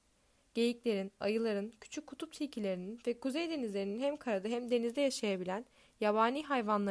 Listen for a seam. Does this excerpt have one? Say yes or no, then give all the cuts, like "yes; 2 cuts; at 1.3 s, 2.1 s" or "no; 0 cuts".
no; 0 cuts